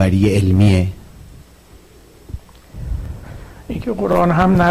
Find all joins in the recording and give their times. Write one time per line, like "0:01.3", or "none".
none